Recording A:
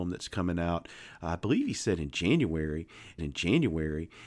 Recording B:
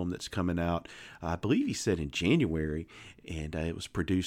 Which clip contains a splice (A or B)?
A